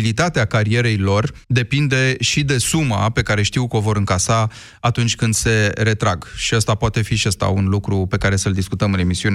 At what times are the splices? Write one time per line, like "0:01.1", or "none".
0:01.4